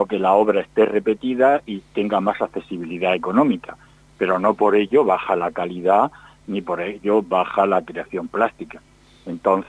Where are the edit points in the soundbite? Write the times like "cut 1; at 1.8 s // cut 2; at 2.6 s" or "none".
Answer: none

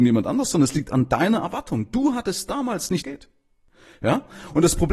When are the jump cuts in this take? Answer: cut 1; at 0.9 s // cut 2; at 3.0 s

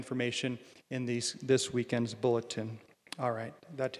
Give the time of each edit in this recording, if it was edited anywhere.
none

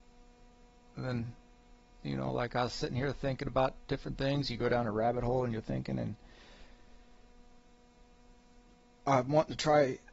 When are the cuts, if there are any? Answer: none

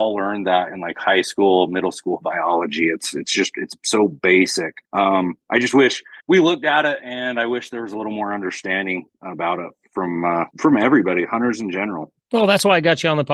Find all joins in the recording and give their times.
cut 1; at 4.8 s // cut 2; at 6.2 s // cut 3; at 10.5 s // cut 4; at 12.2 s

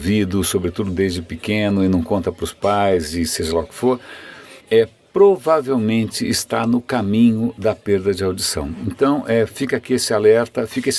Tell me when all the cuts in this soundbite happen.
cut 1; at 4.6 s

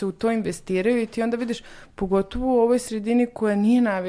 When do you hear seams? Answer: none

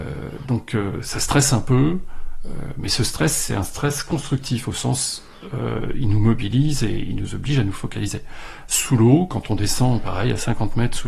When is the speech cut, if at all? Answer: none

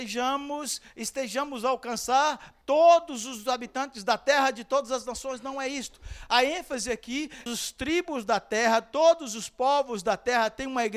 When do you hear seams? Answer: cut 1; at 2.6 s // cut 2; at 7.5 s

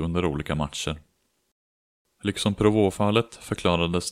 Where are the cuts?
none

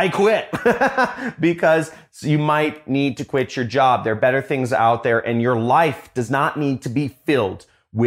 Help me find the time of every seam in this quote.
none

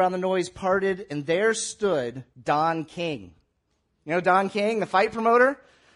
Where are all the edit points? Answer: cut 1; at 2.3 s

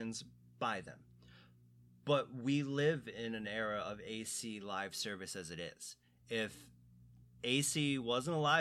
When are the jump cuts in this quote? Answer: none

